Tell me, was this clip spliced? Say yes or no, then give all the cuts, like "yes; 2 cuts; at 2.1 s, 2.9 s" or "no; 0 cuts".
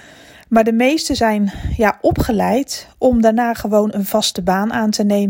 no; 0 cuts